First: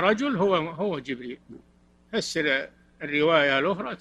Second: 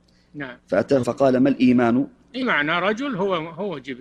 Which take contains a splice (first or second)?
second